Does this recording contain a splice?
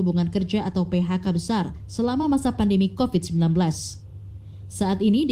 no; 0 cuts

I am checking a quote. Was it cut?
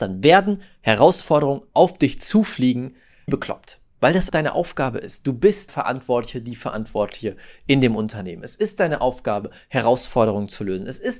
yes; 3 cuts; at 3.3 s, 4.3 s, 5.7 s

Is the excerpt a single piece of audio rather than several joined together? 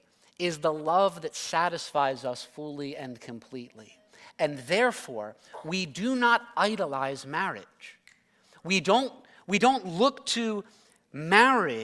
yes; 0 cuts

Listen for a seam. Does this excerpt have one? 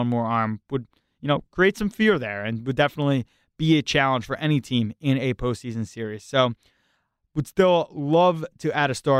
no; 0 cuts

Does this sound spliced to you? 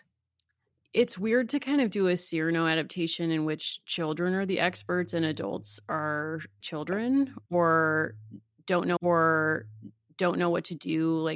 yes; 2 cuts; at 6.6 s, 9.0 s

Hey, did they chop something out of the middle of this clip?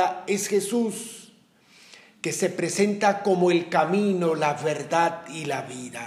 no; 0 cuts

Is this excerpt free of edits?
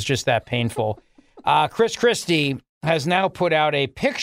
yes; 0 cuts

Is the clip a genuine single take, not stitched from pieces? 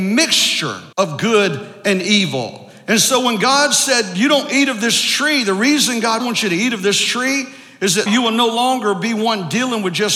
no; 3 cuts; at 0.9 s, 6.2 s, 8.1 s

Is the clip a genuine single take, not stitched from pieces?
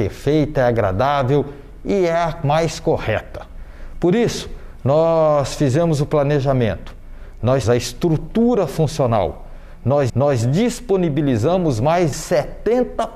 no; 3 cuts; at 7.6 s, 10.1 s, 12.1 s

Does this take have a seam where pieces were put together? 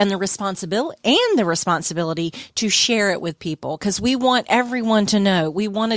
no; 0 cuts

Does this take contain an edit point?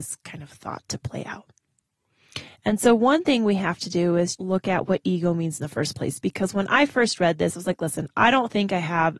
yes; 1 cut; at 4.4 s

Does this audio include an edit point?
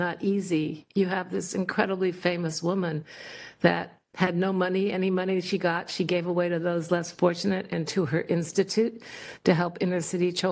no; 0 cuts

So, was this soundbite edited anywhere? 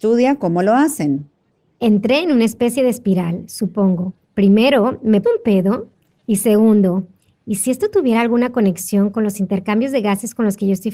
yes; 2 cuts; at 4.2 s, 5.2 s

